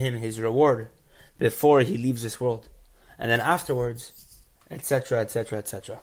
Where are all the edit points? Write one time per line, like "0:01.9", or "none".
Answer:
none